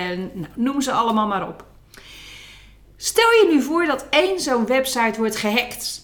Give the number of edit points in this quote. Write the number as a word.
zero